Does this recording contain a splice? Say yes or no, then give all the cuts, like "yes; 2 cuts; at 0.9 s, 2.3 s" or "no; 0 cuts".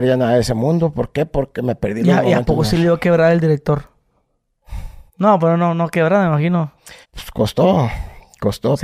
yes; 2 cuts; at 5.1 s, 7.0 s